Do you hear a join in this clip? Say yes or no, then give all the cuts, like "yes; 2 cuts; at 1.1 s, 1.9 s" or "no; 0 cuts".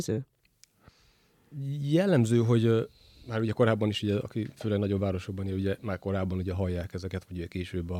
no; 0 cuts